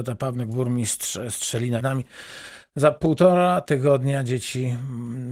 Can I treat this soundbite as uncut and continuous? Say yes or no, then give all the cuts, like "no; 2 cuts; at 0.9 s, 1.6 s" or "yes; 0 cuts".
no; 1 cut; at 1.8 s